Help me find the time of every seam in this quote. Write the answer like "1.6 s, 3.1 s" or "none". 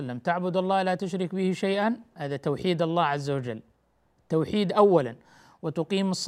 none